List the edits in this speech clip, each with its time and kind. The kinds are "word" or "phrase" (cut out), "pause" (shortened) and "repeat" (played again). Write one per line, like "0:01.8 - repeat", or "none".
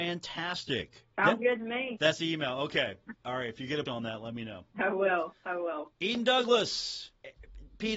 0:03.9 - word